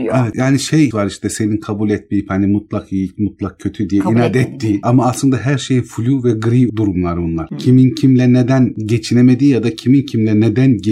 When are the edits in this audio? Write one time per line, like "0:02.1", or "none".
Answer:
0:00.9
0:06.7